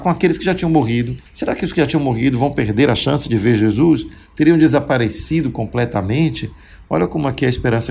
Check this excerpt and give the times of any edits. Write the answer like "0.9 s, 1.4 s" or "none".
1.3 s